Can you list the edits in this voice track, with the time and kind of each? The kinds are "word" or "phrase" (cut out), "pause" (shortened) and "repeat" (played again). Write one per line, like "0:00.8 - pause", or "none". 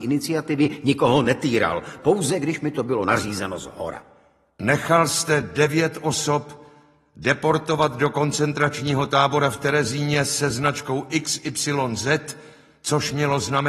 none

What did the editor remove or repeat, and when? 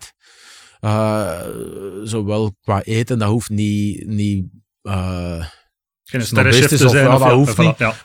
0:03.5 - word

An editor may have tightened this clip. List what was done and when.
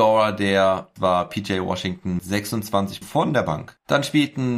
0:01.0 - word
0:02.2 - word
0:03.0 - word

